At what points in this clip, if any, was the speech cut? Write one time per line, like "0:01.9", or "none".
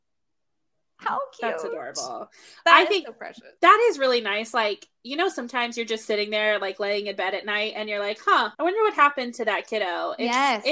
0:03.6
0:08.5